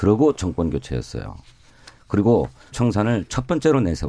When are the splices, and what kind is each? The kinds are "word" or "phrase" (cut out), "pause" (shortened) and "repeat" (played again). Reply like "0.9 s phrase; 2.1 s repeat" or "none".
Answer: 2.7 s word